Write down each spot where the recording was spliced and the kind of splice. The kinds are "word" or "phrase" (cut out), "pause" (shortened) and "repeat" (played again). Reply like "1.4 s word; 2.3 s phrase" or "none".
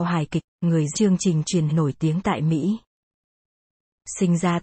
0.9 s word; 1.7 s word